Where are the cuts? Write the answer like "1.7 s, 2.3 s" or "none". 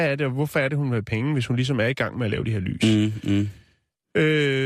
none